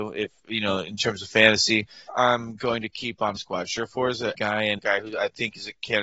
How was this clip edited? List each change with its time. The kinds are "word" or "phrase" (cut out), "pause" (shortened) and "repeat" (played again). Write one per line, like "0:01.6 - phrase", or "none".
0:02.1 - word
0:03.4 - word
0:04.3 - word
0:04.8 - word